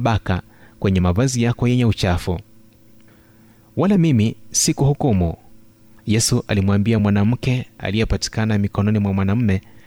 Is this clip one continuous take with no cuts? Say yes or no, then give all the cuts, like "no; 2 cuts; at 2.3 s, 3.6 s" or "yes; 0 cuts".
yes; 0 cuts